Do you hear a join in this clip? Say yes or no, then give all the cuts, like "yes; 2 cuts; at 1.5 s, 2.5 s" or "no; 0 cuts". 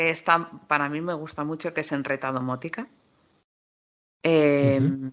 no; 0 cuts